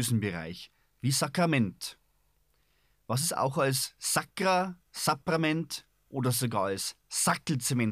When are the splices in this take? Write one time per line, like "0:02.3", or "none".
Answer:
none